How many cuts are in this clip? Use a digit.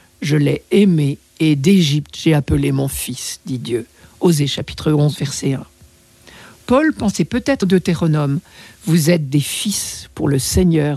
1